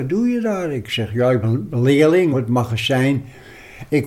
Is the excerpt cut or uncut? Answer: cut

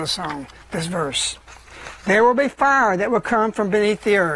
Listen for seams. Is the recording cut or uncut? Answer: uncut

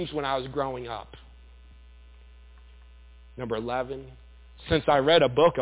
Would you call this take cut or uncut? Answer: uncut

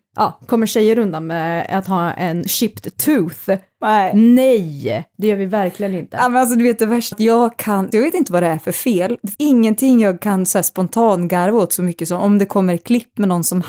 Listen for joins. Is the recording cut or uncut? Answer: cut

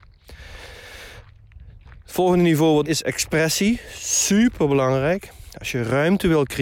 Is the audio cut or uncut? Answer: cut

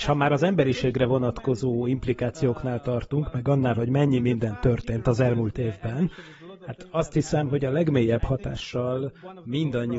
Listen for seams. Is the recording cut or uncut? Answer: uncut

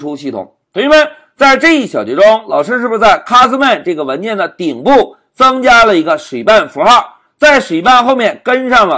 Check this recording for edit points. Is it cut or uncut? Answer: uncut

